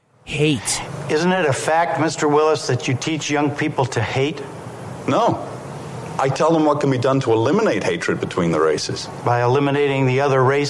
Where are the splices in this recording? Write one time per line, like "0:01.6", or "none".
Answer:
none